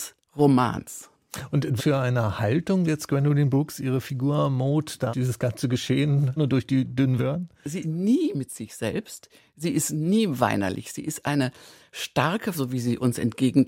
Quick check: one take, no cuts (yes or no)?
no